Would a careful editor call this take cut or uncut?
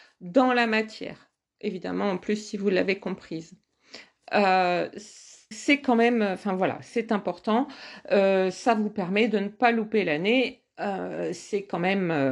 cut